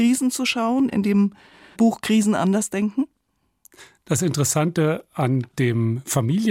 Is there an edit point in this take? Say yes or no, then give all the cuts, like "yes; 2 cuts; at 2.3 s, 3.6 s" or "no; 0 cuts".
no; 0 cuts